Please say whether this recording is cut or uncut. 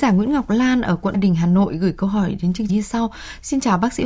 cut